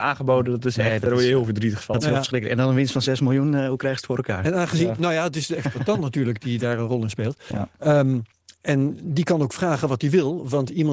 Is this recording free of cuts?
yes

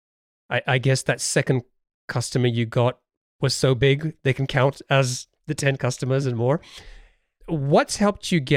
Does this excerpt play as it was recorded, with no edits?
yes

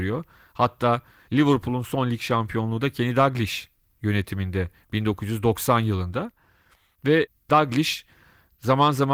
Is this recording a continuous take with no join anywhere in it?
yes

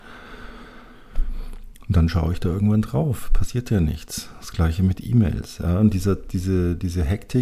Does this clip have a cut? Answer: no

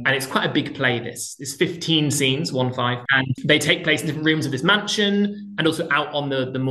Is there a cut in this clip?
no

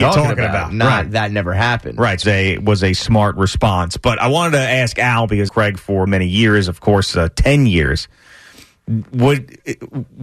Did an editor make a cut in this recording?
yes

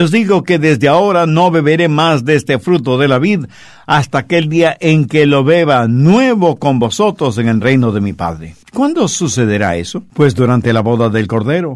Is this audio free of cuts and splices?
yes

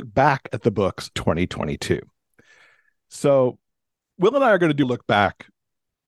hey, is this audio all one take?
no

